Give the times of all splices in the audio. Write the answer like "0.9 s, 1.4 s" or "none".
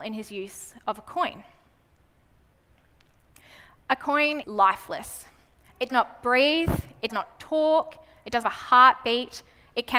4.4 s, 5.9 s, 7.1 s, 8.4 s